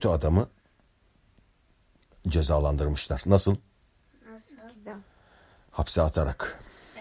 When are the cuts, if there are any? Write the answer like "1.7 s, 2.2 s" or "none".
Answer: none